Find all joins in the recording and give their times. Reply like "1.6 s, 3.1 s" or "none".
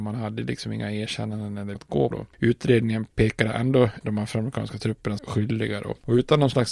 1.7 s, 2.1 s, 3.1 s, 4.0 s, 5.2 s